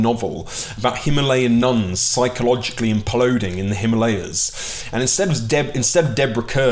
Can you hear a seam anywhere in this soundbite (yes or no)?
no